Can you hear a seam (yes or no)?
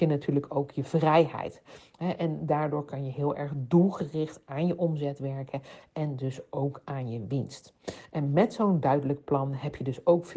no